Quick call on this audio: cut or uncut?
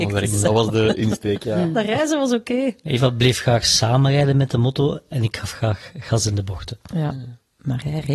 uncut